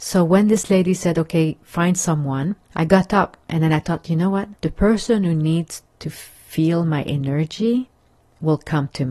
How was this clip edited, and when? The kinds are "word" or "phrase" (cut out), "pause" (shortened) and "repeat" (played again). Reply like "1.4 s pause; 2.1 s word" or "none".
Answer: 2.6 s pause; 4.6 s pause

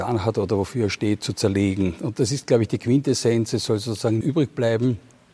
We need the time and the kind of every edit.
4.2 s word

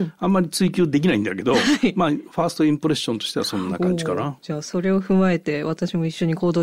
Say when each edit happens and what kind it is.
none

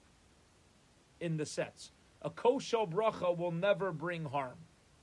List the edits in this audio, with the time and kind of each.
none

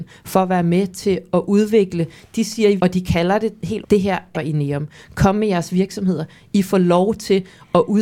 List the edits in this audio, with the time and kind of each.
2.8 s word; 3.8 s word; 4.3 s phrase

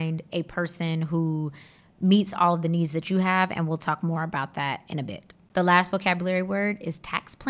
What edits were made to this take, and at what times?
none

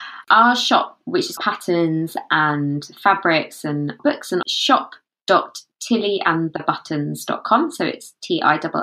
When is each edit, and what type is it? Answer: 1.4 s phrase; 4.0 s word; 4.4 s phrase

